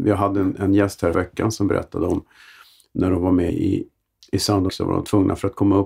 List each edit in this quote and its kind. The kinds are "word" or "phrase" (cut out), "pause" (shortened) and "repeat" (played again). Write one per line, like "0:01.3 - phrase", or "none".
0:01.1 - word
0:03.5 - word
0:04.7 - word